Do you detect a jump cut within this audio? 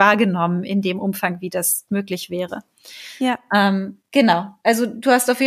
yes; 1 cut; at 1.9 s

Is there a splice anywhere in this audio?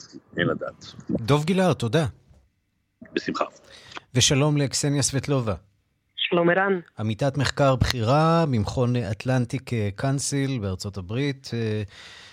no; 0 cuts

